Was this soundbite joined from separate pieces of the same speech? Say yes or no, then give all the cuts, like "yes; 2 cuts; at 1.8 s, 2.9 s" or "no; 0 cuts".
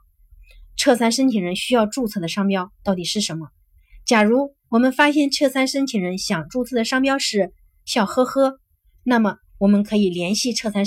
no; 0 cuts